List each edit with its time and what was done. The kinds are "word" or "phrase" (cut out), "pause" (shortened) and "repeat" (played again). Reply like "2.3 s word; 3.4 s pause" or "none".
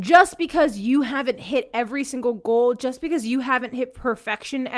none